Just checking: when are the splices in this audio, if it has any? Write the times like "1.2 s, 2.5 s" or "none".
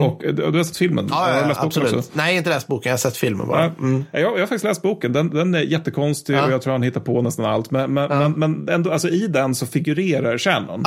none

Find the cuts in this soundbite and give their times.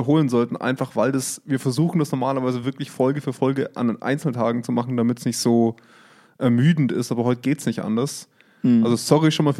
none

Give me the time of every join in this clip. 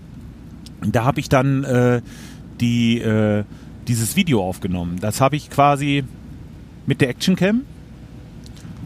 none

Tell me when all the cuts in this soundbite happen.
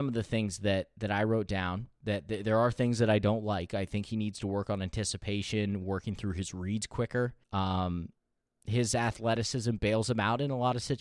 7.4 s

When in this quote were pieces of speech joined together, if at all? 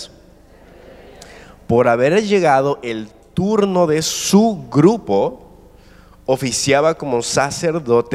none

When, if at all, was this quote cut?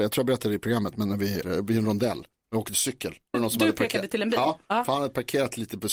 1.4 s, 2.3 s, 3.3 s

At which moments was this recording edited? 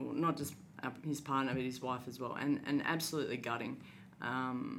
none

